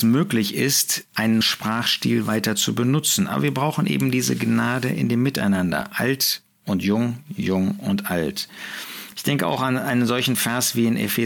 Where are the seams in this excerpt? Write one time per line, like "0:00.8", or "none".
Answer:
0:01.4